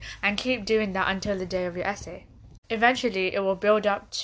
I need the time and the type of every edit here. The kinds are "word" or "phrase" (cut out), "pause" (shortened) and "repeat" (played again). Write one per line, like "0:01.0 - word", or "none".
0:02.6 - pause

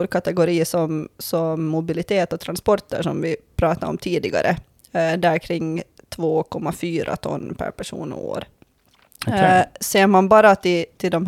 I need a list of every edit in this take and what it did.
none

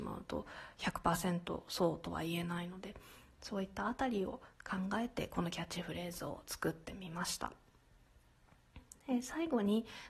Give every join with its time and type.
none

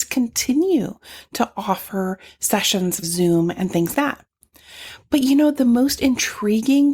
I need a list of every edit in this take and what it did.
0:03.0 - word
0:03.9 - word

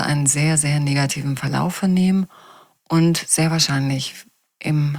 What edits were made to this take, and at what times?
none

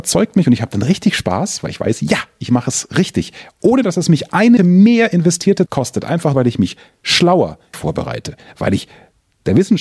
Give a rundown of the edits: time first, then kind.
0:04.6 - word
0:05.7 - word
0:06.3 - word
0:07.7 - word

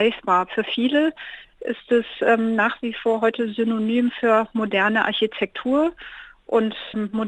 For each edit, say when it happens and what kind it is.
none

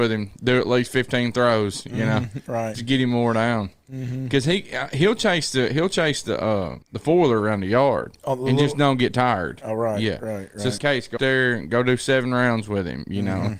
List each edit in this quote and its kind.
0:02.7 - word
0:06.8 - pause
0:10.8 - word
0:11.2 - word

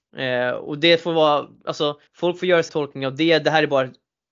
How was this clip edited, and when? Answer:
0:02.1 - pause
0:02.7 - word

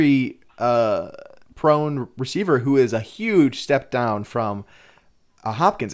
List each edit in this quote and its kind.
none

